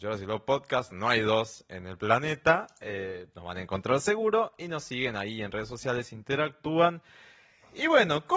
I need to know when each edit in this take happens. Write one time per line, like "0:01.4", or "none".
none